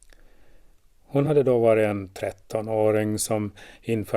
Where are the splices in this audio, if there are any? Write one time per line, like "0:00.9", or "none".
none